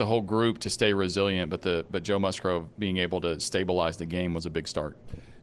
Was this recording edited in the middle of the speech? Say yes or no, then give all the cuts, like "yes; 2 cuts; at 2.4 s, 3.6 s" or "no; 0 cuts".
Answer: no; 0 cuts